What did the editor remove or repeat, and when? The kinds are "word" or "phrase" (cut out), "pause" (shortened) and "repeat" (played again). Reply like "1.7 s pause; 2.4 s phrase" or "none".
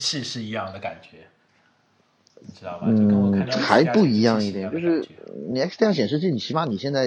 none